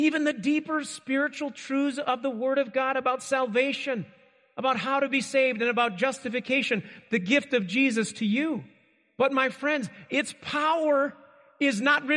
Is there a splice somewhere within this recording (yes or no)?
no